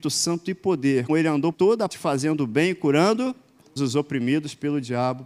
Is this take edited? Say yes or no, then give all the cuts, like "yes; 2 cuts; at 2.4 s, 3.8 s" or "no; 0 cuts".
yes; 4 cuts; at 1.1 s, 1.5 s, 1.9 s, 3.8 s